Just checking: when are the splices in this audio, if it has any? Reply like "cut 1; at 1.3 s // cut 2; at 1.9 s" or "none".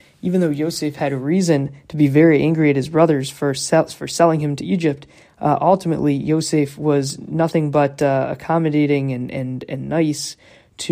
none